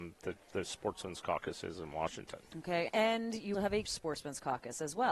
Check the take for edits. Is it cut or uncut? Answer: cut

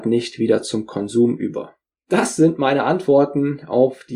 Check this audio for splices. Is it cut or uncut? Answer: uncut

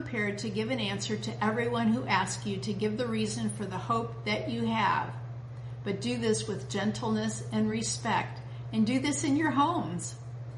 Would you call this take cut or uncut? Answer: uncut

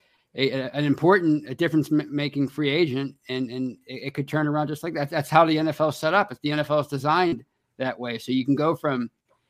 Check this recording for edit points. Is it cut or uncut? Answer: uncut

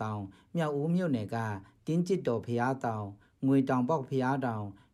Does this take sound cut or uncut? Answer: uncut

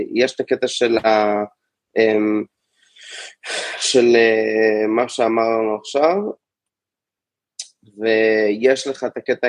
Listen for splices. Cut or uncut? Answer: uncut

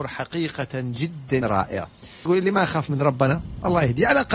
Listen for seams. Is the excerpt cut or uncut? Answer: cut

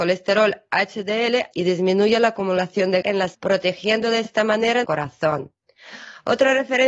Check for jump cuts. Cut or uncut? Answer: cut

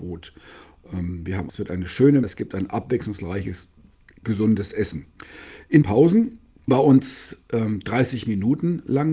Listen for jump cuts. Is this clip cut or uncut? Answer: cut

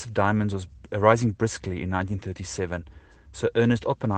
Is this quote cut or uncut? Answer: uncut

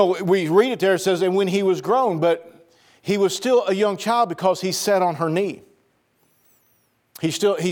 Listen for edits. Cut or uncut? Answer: uncut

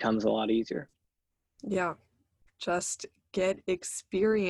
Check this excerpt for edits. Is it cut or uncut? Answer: uncut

